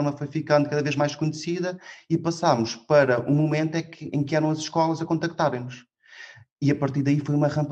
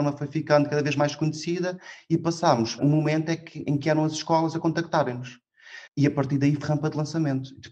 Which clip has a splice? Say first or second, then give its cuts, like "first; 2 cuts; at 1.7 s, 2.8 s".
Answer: second; 3 cuts; at 2.8 s, 5.9 s, 6.6 s